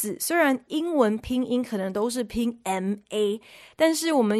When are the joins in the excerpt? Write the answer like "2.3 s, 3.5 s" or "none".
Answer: none